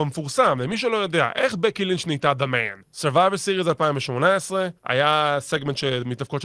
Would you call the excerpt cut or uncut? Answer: cut